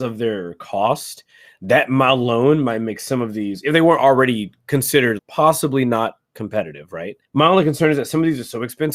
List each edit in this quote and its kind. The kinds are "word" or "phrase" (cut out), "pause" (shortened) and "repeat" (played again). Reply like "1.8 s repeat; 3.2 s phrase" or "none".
5.2 s word; 7.2 s pause